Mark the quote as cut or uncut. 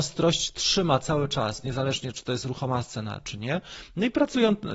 uncut